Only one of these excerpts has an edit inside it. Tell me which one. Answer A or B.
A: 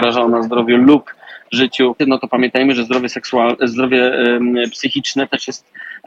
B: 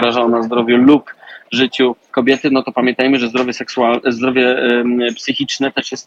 A